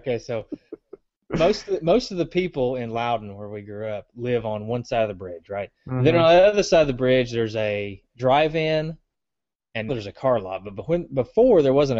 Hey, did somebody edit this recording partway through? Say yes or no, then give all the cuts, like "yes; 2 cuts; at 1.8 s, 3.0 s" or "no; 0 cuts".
yes; 2 cuts; at 5.8 s, 9.9 s